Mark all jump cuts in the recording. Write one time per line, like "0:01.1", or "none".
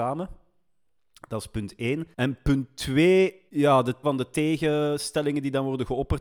0:02.1
0:03.5
0:04.0

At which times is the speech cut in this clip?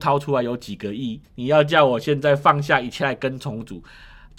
0:01.2

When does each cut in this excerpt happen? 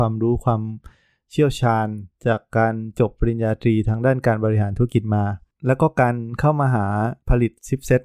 0:02.1

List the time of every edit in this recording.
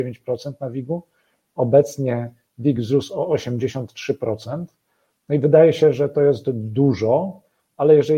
none

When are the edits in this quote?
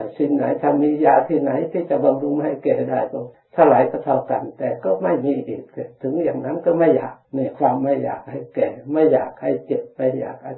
0:03.3
0:07.2

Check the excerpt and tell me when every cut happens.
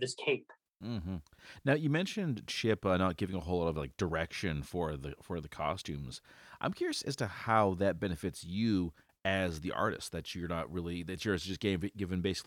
none

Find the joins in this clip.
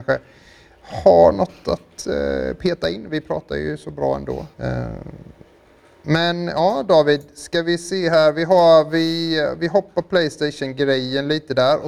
0:04.5

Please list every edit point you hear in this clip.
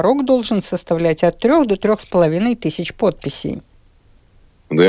none

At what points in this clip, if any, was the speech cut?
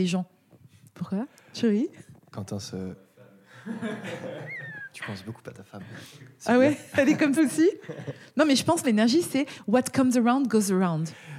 0:07.4
0:08.8

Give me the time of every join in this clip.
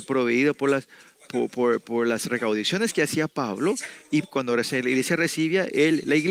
none

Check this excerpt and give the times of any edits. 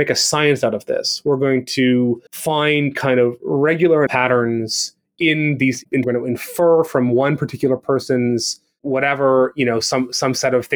0:02.3
0:04.1
0:06.0

